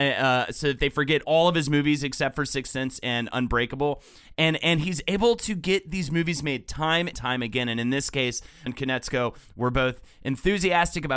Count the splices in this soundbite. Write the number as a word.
three